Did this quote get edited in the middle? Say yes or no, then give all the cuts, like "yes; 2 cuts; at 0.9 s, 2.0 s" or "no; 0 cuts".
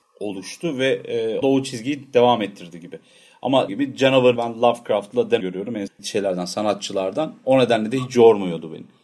yes; 5 cuts; at 1.4 s, 3.7 s, 4.4 s, 5.4 s, 5.9 s